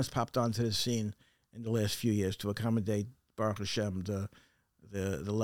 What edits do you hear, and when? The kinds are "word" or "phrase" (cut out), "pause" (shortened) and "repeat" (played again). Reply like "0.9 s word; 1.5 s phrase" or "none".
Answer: none